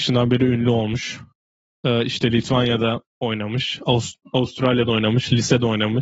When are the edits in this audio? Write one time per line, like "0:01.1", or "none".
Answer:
none